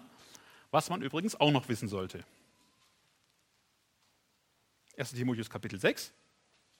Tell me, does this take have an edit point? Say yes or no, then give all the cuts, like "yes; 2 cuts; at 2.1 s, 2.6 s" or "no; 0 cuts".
no; 0 cuts